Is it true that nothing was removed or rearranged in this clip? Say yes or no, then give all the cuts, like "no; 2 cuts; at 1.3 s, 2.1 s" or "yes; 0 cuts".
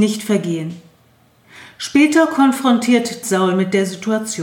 no; 1 cut; at 3.2 s